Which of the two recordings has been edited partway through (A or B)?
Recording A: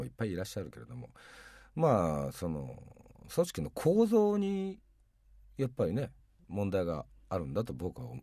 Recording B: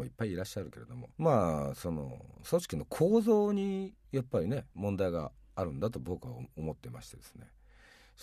B